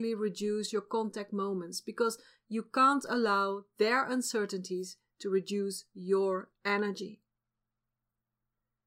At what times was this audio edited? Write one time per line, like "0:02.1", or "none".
none